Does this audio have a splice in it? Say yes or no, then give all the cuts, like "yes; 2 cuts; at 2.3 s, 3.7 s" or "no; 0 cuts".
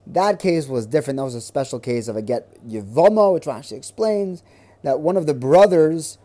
no; 0 cuts